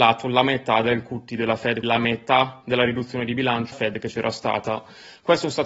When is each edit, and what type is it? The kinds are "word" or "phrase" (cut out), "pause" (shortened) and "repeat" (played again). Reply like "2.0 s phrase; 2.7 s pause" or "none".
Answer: 1.8 s word; 3.7 s word